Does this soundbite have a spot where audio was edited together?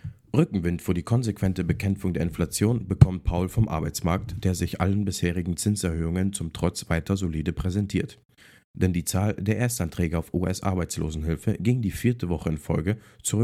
no; 0 cuts

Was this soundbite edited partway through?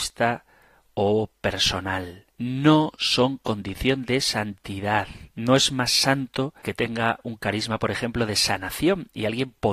yes; 3 cuts; at 2.3 s, 5.3 s, 6.6 s

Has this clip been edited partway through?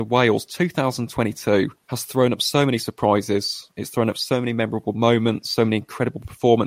yes; 1 cut; at 1.8 s

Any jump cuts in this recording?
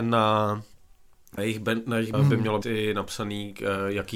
yes; 3 cuts; at 1.4 s, 2.1 s, 2.6 s

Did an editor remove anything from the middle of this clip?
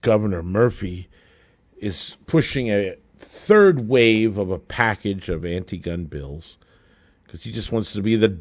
no; 0 cuts

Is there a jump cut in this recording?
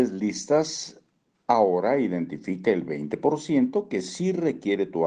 no; 0 cuts

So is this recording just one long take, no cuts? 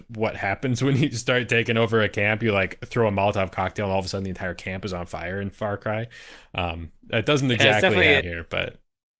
no; 1 cut; at 8.2 s

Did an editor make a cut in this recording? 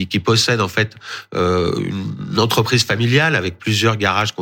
no; 0 cuts

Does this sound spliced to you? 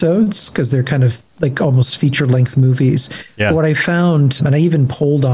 yes; 1 cut; at 4.4 s

